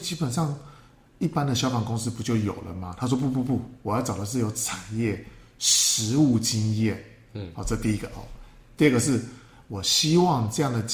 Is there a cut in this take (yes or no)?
no